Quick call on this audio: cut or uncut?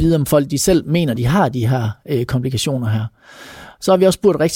uncut